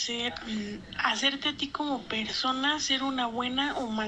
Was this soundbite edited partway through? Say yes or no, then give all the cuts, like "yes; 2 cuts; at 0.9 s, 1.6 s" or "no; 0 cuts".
no; 0 cuts